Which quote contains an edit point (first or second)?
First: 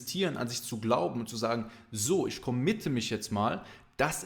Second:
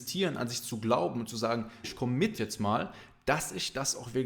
second